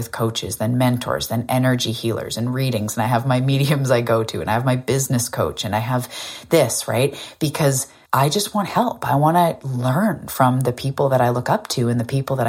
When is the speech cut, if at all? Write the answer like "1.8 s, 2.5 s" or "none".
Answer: 8.1 s